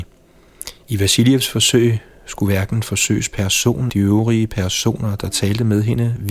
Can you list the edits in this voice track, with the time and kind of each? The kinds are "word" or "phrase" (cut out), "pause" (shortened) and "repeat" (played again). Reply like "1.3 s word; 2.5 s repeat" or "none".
3.9 s word